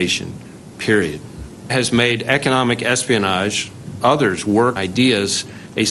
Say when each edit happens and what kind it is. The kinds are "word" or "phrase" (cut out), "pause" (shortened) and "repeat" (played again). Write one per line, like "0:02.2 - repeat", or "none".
0:01.7 - word
0:04.0 - word
0:04.8 - word